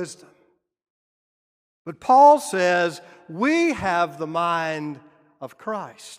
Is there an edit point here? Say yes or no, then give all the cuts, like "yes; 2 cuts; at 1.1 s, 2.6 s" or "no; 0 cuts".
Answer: no; 0 cuts